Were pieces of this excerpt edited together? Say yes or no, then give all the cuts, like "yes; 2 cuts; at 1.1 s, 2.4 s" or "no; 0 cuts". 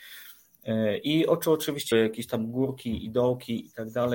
yes; 1 cut; at 1.9 s